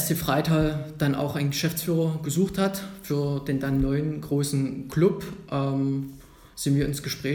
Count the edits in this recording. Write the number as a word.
zero